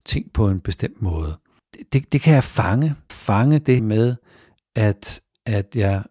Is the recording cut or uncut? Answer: cut